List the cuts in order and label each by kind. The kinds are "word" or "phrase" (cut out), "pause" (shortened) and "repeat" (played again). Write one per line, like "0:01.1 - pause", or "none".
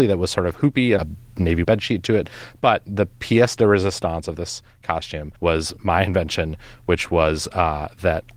0:01.0 - phrase
0:01.6 - word
0:05.4 - pause